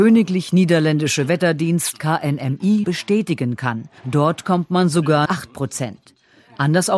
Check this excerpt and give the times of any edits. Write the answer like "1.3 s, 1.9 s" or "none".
2.8 s, 4.0 s, 5.3 s

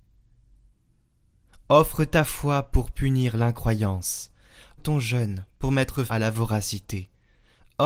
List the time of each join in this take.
4.8 s, 5.5 s, 6.1 s

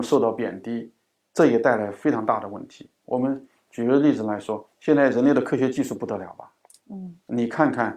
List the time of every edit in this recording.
4.7 s

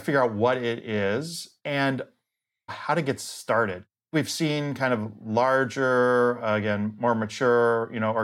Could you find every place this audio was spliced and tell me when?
2.7 s

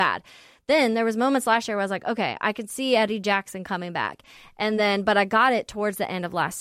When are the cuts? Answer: none

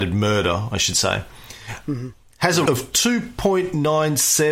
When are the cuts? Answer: 2.7 s

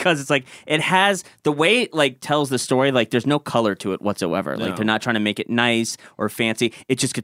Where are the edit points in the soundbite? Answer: none

